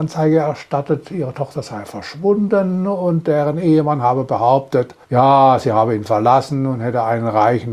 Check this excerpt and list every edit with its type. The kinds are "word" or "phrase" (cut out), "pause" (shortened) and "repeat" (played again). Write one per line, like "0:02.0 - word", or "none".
0:05.0 - pause